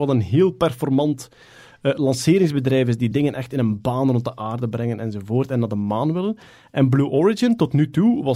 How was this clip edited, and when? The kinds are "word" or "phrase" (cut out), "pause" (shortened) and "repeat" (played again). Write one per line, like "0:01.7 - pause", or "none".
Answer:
none